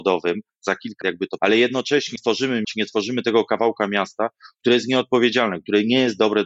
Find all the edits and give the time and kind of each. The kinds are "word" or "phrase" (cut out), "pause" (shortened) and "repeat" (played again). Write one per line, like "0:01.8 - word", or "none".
0:01.0 - word
0:01.4 - word
0:02.2 - word
0:02.6 - word

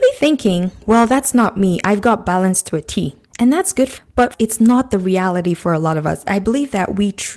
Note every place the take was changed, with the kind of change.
0:03.3 - pause
0:04.0 - word

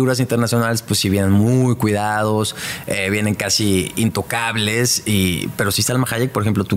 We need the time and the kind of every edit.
none

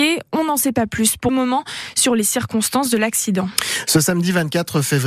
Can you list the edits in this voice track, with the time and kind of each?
0:01.3 - word

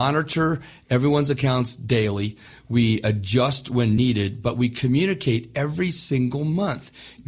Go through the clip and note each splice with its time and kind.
none

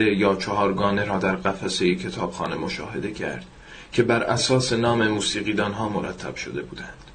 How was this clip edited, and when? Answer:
none

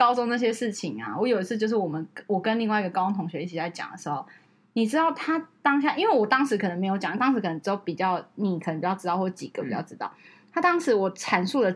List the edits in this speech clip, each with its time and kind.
none

